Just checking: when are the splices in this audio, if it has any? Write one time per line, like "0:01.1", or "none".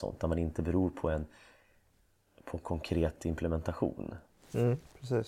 none